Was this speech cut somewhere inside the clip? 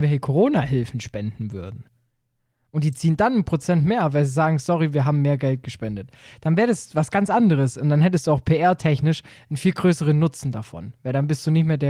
no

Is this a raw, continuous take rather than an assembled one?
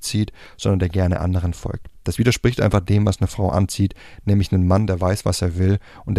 yes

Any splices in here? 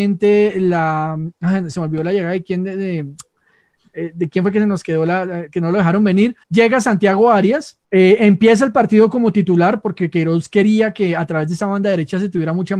yes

